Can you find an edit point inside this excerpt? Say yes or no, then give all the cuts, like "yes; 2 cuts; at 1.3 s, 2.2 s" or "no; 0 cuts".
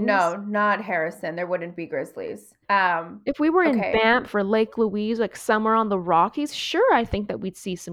yes; 1 cut; at 2.6 s